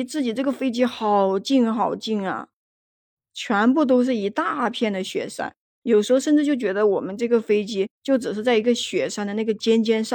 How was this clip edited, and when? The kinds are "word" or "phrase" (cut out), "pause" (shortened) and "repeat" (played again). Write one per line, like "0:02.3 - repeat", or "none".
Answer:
0:07.9 - pause